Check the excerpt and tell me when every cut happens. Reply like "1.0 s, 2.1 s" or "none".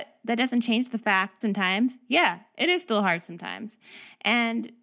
1.4 s